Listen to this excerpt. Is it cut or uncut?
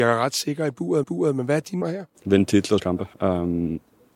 cut